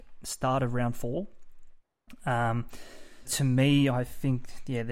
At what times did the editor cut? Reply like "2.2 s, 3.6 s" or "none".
3.2 s